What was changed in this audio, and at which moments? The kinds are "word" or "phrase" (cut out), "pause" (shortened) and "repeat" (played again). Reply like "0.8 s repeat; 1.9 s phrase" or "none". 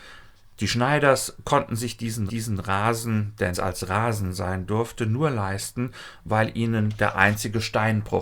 2.3 s repeat; 3.5 s word